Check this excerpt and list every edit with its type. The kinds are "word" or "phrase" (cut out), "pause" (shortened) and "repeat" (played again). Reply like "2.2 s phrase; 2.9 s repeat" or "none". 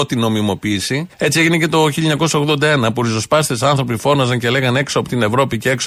1.1 s pause